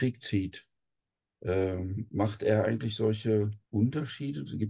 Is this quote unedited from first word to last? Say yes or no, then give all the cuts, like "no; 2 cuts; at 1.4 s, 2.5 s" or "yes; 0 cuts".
no; 1 cut; at 3.7 s